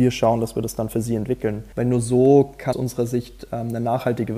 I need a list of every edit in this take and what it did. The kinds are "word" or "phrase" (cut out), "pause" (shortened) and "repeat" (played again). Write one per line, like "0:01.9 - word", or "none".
0:01.7 - pause
0:02.7 - word